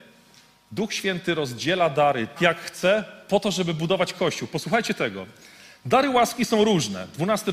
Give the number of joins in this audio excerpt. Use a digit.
1